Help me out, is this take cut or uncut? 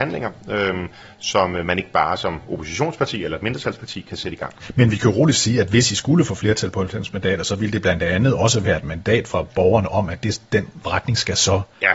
uncut